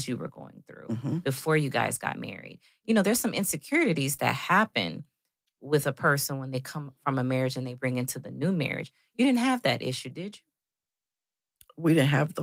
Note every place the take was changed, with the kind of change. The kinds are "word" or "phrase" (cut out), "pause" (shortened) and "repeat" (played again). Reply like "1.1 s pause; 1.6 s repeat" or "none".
none